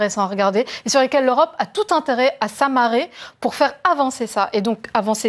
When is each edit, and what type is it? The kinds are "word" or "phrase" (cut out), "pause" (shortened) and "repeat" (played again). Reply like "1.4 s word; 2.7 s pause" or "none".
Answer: none